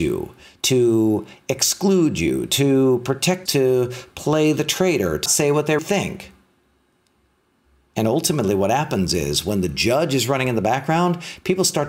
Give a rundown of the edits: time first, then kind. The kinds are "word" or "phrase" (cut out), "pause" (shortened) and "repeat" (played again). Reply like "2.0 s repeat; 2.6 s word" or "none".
3.5 s word; 5.3 s word; 5.8 s word